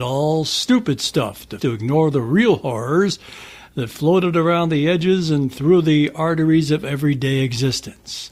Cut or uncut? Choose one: cut